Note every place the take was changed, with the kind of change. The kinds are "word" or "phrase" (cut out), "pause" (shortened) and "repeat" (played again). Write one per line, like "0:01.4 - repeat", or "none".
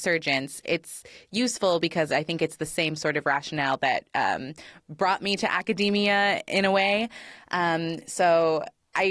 none